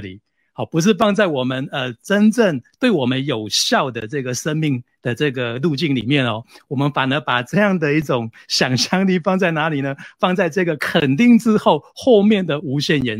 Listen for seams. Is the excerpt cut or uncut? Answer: uncut